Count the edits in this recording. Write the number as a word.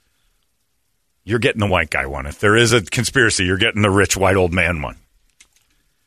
zero